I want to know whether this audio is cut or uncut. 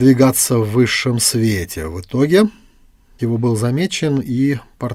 cut